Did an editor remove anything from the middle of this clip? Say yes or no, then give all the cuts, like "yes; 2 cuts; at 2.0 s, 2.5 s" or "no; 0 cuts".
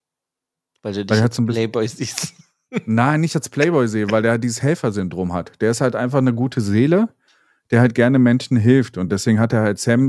no; 0 cuts